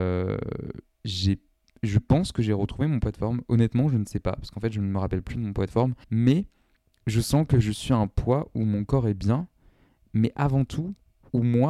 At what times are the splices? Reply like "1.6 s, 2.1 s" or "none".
6.0 s